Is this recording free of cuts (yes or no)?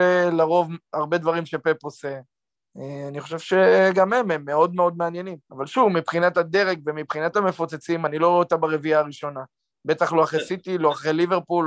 no